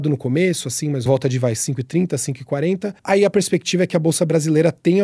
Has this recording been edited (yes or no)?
yes